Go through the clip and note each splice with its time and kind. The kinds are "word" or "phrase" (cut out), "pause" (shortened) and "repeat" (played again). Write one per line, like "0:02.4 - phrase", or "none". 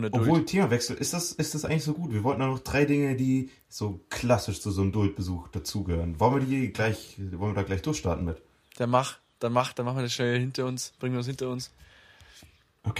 none